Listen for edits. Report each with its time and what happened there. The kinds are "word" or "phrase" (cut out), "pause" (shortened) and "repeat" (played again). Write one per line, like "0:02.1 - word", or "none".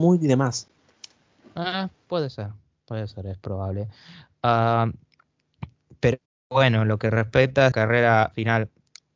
0:07.7 - word